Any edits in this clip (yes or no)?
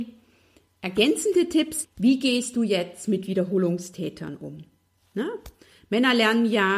yes